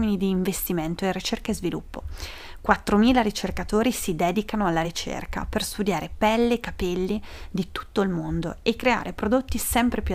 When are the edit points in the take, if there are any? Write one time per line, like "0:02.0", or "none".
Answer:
none